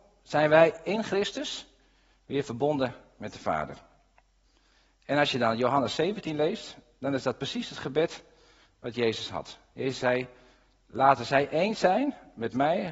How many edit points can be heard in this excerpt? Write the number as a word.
zero